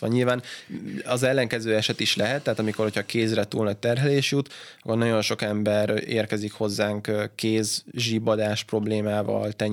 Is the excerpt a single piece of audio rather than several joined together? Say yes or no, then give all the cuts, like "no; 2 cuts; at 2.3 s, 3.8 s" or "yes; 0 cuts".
yes; 0 cuts